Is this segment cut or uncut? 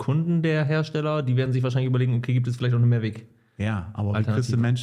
uncut